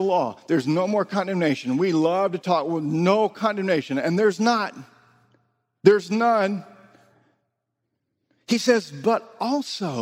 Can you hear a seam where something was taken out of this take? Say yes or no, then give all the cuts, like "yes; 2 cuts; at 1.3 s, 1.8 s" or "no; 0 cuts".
no; 0 cuts